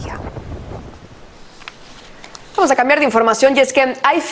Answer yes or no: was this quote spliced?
no